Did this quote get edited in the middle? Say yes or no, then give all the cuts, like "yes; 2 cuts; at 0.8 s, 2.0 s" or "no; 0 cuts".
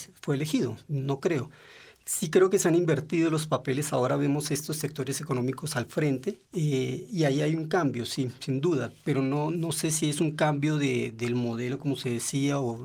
yes; 1 cut; at 6.4 s